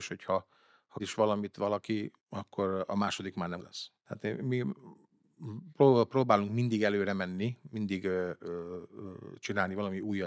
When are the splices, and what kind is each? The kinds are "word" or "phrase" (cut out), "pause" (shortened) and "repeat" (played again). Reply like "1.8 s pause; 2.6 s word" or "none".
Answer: 1.0 s word; 2.2 s pause; 3.6 s word; 4.0 s pause